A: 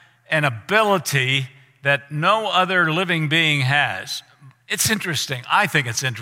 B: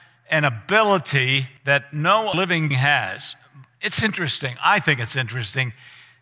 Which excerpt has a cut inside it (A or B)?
B